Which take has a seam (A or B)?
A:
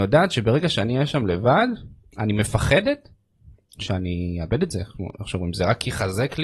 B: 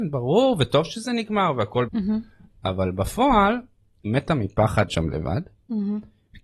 B